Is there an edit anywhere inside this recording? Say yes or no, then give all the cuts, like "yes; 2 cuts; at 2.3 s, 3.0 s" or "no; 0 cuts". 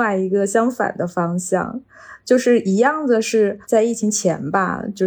yes; 1 cut; at 3.6 s